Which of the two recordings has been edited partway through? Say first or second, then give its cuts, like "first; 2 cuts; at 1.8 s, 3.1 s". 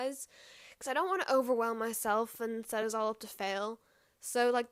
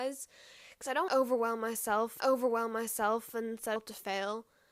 second; 3 cuts; at 1.1 s, 2.2 s, 3.8 s